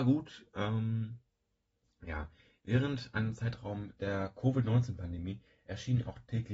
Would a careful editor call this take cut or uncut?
uncut